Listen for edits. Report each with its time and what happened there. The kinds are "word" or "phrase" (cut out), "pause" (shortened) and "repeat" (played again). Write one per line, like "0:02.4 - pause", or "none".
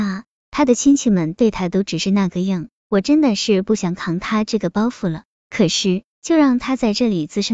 0:06.1 - pause